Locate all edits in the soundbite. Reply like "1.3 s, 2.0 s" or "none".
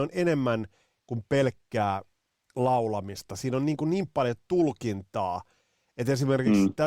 none